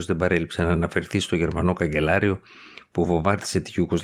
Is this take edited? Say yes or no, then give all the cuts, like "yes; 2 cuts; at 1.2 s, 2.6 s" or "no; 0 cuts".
no; 0 cuts